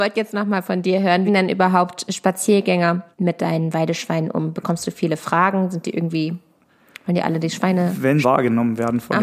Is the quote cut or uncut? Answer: cut